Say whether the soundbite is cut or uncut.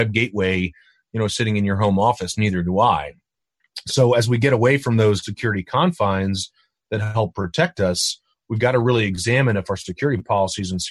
cut